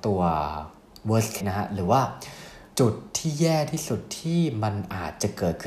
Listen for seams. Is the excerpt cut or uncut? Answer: cut